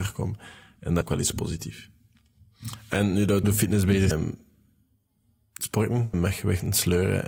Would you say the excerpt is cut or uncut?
cut